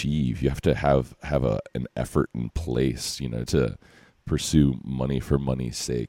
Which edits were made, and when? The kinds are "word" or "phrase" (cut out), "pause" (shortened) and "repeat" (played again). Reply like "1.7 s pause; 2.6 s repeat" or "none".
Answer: 3.5 s word

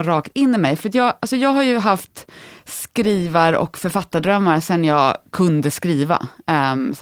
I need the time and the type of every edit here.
none

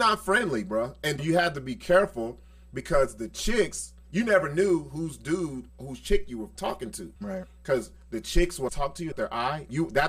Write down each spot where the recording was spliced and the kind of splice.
1.2 s word; 5.7 s pause; 6.6 s word; 7.2 s pause; 8.7 s word; 9.1 s phrase

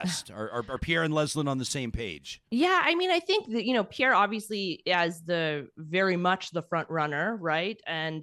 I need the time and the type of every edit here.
2.5 s pause

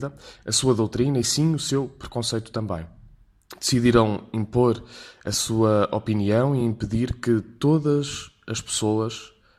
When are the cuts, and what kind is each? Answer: none

